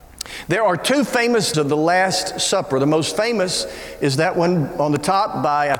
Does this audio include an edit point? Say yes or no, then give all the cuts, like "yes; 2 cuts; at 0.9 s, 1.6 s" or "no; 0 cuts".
yes; 1 cut; at 1.5 s